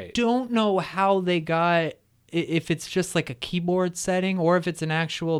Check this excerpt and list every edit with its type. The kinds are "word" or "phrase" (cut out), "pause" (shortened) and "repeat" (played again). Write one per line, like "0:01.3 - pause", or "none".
none